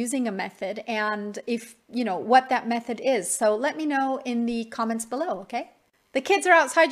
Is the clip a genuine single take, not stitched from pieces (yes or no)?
yes